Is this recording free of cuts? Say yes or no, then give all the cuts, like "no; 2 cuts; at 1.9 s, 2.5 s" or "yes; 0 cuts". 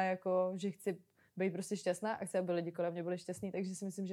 yes; 0 cuts